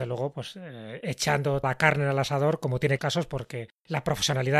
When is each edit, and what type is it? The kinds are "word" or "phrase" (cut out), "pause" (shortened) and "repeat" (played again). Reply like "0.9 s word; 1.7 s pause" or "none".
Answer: 1.6 s word; 3.0 s phrase